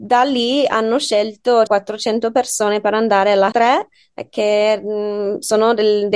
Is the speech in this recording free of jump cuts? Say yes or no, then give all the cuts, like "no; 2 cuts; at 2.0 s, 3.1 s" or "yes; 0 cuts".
no; 2 cuts; at 1.7 s, 3.5 s